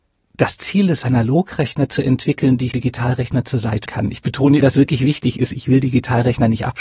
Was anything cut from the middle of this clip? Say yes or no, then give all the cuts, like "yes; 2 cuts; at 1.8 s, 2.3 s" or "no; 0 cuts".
yes; 4 cuts; at 1.0 s, 2.7 s, 3.9 s, 4.6 s